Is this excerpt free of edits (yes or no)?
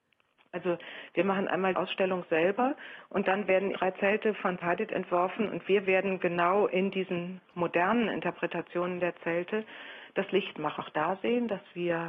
no